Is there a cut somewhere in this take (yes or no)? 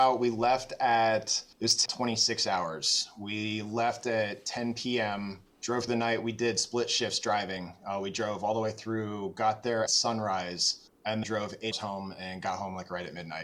yes